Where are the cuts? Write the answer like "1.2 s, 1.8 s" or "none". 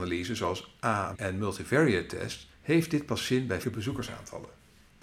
1.1 s, 2.5 s, 3.6 s